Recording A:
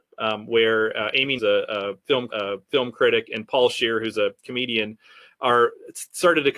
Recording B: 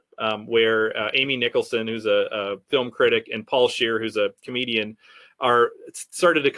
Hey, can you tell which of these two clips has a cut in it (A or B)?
A